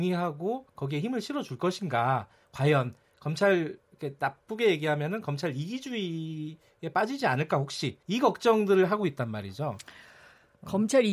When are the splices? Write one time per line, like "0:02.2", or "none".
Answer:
0:08.0

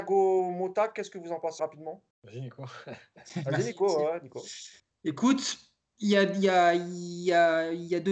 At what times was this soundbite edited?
0:01.6
0:02.1
0:04.8

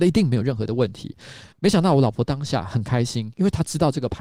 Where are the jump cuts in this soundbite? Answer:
0:01.5

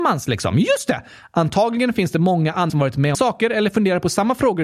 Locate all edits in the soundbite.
0:02.7
0:03.1

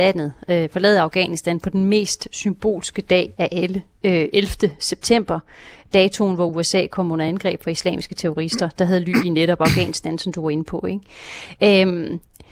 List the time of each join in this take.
none

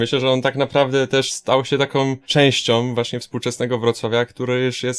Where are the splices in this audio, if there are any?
none

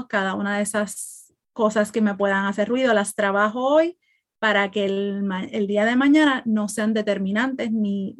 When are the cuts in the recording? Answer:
none

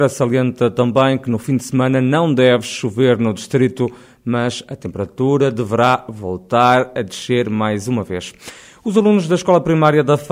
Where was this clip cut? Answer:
none

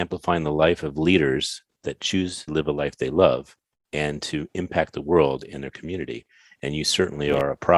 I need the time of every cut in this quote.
0:02.5

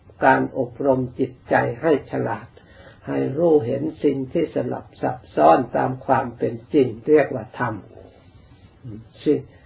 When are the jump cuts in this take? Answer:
none

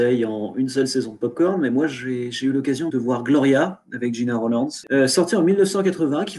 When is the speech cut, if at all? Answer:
0:02.9

